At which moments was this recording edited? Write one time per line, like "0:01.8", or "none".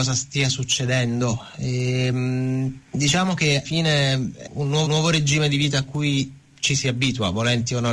0:02.9
0:03.6
0:04.5
0:04.9

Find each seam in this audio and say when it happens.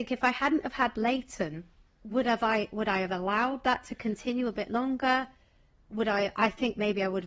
0:01.9

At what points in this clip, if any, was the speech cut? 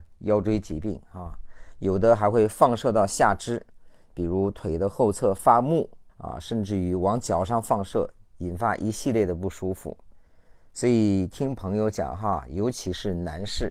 0:06.1

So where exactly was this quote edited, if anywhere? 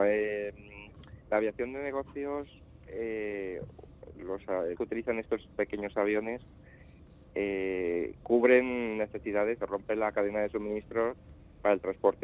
0:01.2
0:04.1
0:04.7
0:09.6

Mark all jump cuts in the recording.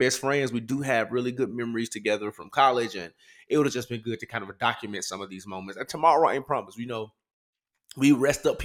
none

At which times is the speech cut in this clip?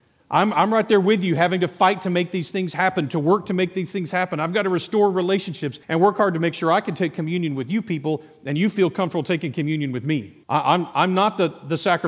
0:05.8
0:10.4

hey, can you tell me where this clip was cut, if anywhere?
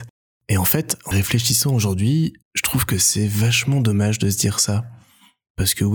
0:01.1
0:02.4

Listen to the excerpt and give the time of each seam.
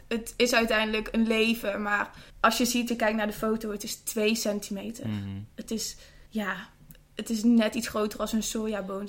0:02.3
0:02.9
0:06.3

